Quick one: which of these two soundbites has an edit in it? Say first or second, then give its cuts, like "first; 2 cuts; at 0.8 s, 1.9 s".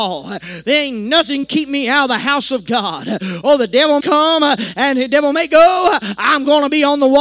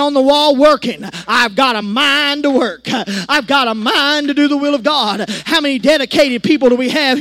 first; 2 cuts; at 1.4 s, 4.0 s